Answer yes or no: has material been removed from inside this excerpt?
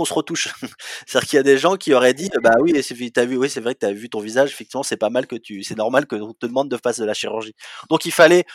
no